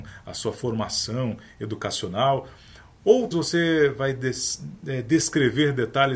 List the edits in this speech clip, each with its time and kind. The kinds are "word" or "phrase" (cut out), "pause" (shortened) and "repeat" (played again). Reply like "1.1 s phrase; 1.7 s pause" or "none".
3.3 s word

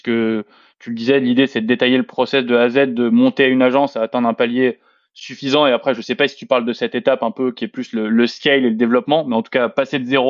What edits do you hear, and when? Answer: none

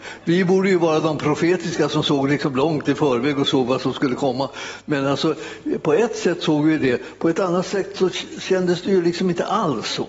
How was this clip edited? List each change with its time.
none

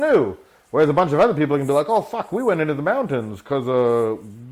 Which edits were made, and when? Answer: none

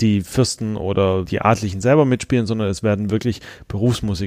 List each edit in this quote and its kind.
1.3 s word

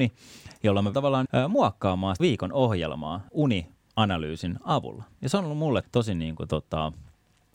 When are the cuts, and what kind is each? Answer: 0.9 s word; 1.3 s word; 2.2 s word; 3.3 s word; 5.8 s word

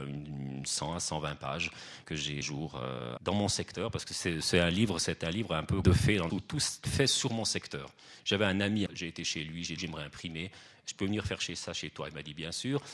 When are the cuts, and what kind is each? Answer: 2.0 s word; 2.4 s word; 3.2 s word; 5.8 s word; 6.3 s word; 6.8 s word; 8.9 s word; 9.8 s word

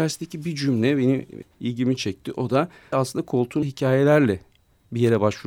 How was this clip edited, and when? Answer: 1.4 s word; 2.9 s word; 3.6 s word

